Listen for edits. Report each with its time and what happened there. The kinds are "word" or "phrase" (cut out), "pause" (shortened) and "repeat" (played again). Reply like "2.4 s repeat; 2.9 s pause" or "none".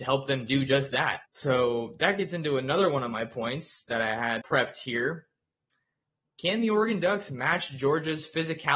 1.2 s pause; 4.4 s word